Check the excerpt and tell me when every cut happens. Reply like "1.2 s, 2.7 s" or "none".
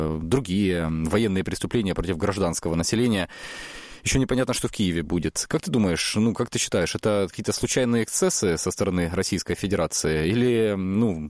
none